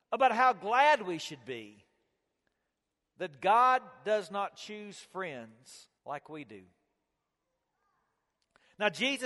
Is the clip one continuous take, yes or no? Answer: no